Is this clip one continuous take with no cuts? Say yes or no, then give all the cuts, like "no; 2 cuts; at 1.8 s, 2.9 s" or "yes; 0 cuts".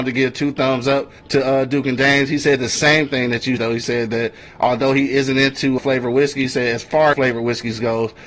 no; 4 cuts; at 1.2 s, 3.6 s, 5.8 s, 7.1 s